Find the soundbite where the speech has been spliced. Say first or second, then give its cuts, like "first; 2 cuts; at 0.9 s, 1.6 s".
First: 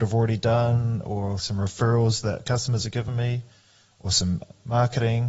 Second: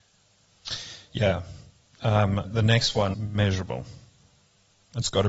second; 2 cuts; at 2.4 s, 3.1 s